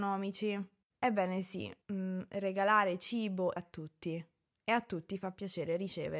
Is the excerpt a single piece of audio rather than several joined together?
no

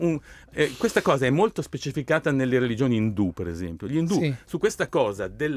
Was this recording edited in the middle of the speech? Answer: no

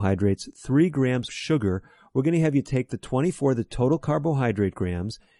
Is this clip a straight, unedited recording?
no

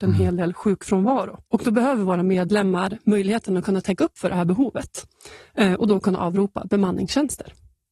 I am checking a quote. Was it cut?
yes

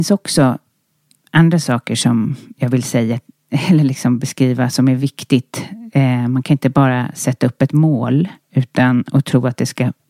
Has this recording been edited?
no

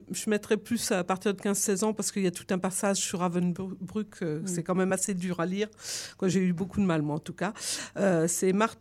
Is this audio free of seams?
yes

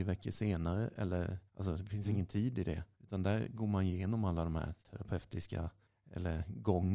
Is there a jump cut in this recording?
yes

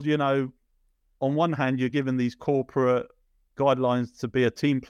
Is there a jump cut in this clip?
no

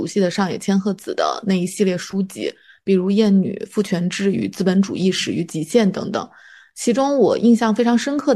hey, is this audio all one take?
yes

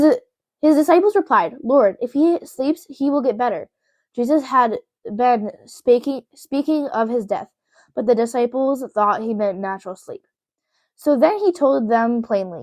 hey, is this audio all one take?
yes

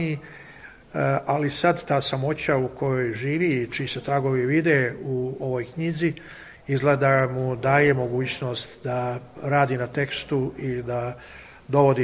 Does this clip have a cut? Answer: no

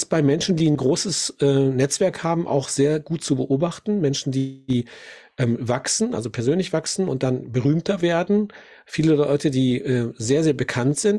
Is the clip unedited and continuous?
yes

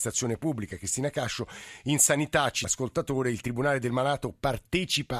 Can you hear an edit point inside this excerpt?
yes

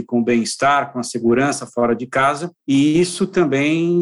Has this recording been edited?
no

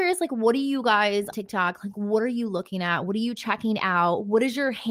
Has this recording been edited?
yes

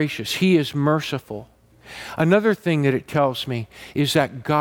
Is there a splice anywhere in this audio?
no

